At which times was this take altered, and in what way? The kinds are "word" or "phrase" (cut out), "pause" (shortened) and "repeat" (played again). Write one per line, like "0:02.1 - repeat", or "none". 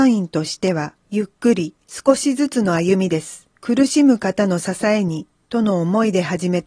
0:01.0 - pause
0:01.8 - pause
0:03.6 - pause